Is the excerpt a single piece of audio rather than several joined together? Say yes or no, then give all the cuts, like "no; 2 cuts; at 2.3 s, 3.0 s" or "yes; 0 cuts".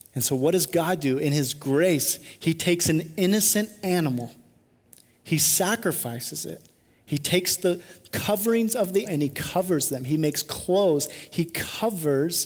no; 1 cut; at 9.1 s